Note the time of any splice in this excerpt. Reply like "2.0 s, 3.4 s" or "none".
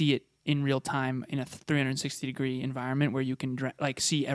none

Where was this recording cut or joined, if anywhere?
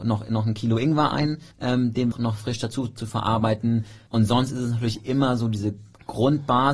1.5 s, 2.1 s, 4.1 s

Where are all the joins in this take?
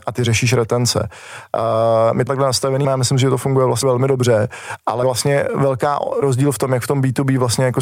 2.3 s, 2.8 s, 3.8 s, 5.0 s, 6.2 s

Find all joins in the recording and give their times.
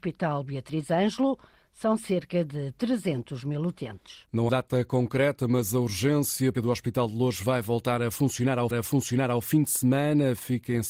4.5 s, 6.5 s, 8.7 s

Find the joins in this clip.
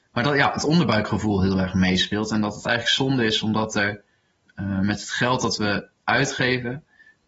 none

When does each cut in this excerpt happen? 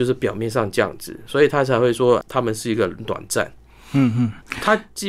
2.2 s

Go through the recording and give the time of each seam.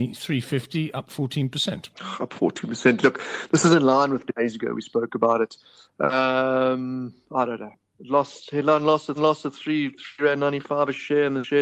1.9 s, 4.3 s, 9.2 s

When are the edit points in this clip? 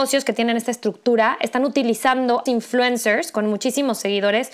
2.5 s

